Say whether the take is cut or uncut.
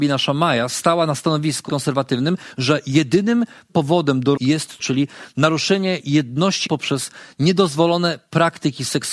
cut